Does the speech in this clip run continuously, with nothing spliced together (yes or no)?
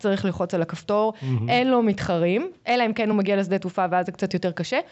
yes